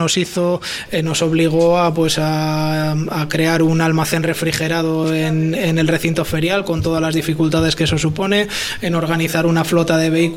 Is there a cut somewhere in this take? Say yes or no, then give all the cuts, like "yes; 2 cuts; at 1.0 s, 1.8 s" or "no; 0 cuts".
no; 0 cuts